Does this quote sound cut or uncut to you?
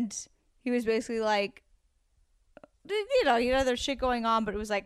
uncut